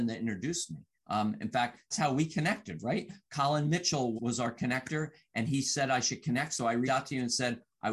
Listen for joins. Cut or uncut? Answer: cut